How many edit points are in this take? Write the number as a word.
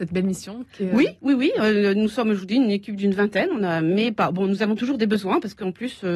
zero